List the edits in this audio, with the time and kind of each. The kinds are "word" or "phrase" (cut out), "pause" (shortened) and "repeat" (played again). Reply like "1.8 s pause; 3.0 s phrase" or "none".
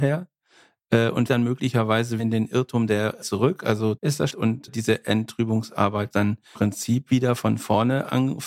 1.3 s word; 2.2 s word; 3.2 s word; 4.0 s word; 4.3 s word; 4.7 s word; 6.1 s word; 6.5 s word